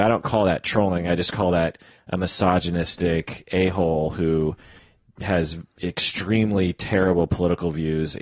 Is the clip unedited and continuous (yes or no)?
yes